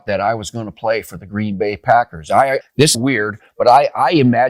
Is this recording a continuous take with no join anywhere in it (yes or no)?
no